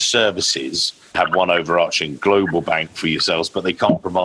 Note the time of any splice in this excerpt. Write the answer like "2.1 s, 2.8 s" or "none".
1.1 s

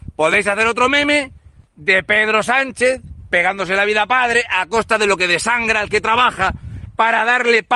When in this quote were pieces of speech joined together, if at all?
none

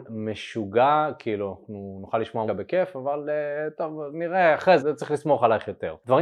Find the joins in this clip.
2.5 s, 4.8 s

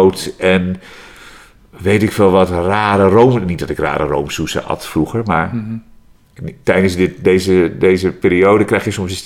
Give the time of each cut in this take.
none

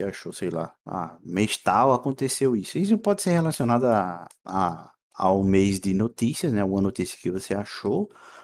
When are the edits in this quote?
none

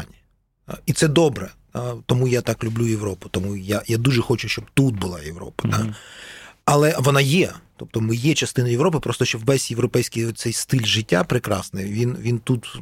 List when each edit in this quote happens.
none

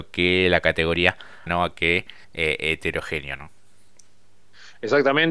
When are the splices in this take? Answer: 1.5 s, 2.2 s

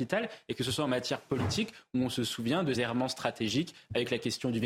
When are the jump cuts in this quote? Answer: 2.7 s

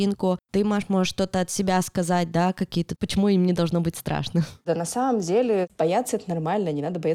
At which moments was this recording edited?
3.0 s

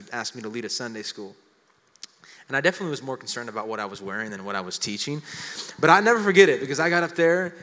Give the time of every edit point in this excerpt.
none

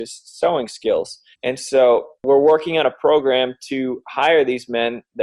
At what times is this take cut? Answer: 1.3 s

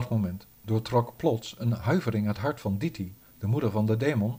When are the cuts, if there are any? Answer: none

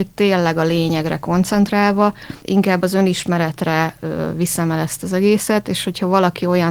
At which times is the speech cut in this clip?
2.4 s

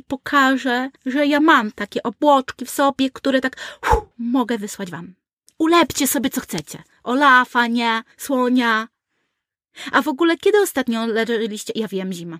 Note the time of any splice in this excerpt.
1.0 s, 4.1 s, 5.5 s, 8.1 s

